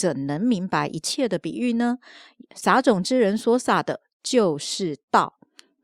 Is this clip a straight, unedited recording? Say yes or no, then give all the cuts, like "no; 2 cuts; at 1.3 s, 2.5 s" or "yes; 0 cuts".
yes; 0 cuts